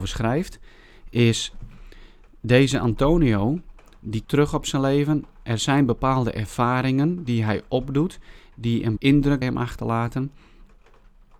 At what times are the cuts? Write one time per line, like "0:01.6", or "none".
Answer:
0:04.2
0:09.0
0:09.4